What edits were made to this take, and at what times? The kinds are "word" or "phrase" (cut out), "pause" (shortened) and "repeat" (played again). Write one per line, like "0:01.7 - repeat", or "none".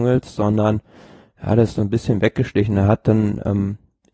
0:01.8 - phrase